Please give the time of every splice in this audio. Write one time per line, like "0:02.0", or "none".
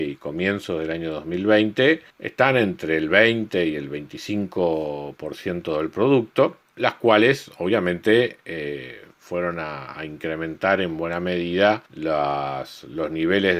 0:02.1
0:06.7
0:11.9